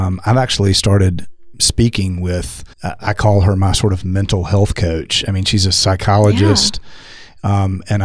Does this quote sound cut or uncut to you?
cut